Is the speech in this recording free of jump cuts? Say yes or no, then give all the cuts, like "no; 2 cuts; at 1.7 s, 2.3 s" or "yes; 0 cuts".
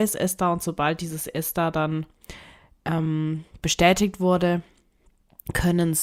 yes; 0 cuts